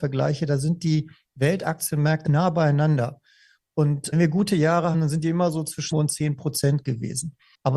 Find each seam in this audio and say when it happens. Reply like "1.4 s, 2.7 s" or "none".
2.3 s, 4.1 s, 4.9 s, 5.9 s